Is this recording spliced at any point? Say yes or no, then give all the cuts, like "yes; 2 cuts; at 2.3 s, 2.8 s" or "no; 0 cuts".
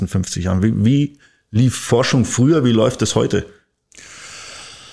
no; 0 cuts